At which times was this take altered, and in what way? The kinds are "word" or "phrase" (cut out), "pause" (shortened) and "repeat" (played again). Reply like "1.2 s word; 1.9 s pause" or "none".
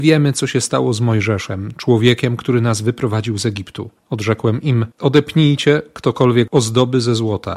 4.0 s pause; 4.9 s pause; 6.5 s word